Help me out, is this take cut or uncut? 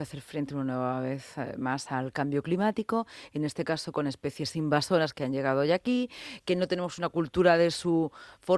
uncut